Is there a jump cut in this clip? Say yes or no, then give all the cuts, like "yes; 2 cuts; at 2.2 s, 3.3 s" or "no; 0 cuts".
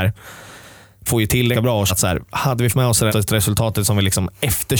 yes; 5 cuts; at 1.1 s, 1.5 s, 1.9 s, 2.7 s, 3.1 s